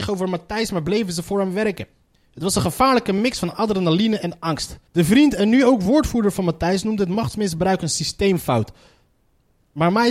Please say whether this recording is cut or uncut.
cut